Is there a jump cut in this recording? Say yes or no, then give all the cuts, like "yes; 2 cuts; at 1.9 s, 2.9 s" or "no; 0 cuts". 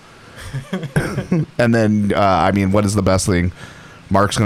no; 0 cuts